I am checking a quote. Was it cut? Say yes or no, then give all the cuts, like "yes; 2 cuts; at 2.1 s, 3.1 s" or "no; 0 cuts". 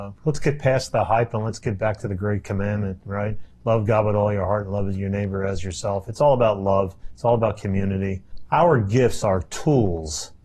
no; 0 cuts